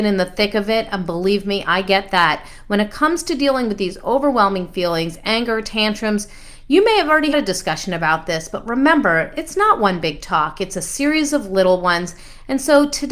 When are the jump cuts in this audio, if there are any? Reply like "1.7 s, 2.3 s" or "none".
7.3 s